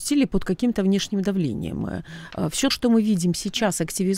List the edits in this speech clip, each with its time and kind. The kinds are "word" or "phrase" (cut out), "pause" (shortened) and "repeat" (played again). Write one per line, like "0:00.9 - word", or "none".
0:02.7 - word